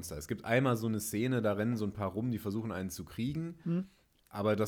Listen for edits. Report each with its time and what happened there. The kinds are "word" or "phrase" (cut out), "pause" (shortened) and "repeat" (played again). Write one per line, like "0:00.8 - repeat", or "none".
none